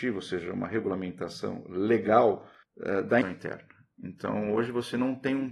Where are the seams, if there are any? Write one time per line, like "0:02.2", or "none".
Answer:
0:02.6
0:03.2